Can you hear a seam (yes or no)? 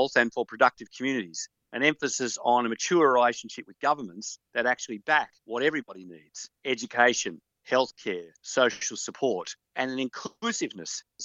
yes